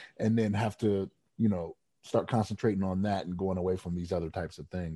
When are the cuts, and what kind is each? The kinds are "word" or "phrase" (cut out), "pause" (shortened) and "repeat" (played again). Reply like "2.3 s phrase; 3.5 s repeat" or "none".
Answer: none